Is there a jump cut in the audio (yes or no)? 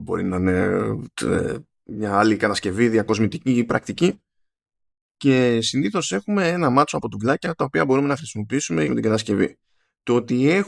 yes